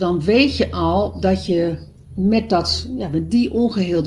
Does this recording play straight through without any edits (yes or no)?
yes